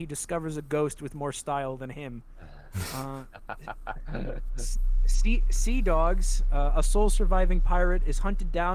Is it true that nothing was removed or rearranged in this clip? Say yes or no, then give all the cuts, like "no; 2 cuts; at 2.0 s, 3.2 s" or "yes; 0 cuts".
yes; 0 cuts